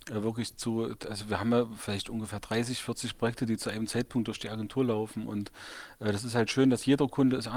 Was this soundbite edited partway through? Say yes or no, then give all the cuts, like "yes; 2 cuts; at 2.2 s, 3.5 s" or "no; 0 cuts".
no; 0 cuts